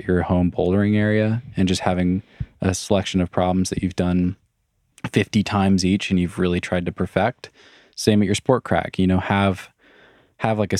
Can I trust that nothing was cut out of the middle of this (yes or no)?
yes